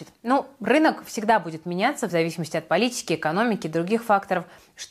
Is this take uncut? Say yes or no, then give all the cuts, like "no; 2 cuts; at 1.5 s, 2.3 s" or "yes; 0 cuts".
yes; 0 cuts